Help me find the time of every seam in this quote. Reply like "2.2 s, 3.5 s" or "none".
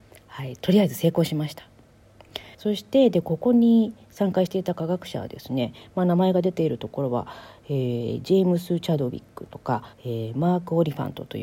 2.5 s, 9.9 s